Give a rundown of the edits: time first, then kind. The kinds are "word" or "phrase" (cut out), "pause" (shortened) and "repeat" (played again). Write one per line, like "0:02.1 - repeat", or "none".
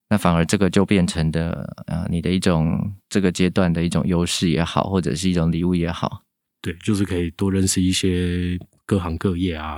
none